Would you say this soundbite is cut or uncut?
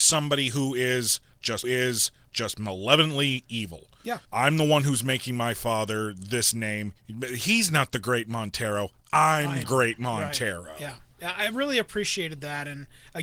cut